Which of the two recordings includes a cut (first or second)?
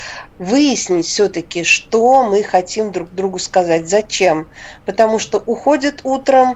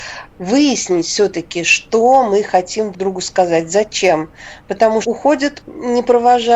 second